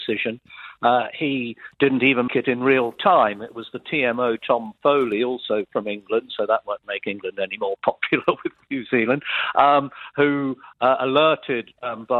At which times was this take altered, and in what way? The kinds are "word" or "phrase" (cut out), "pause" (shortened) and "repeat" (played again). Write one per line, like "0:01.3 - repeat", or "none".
0:02.3 - word

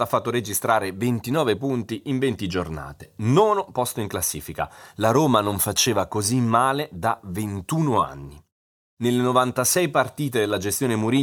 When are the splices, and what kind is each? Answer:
none

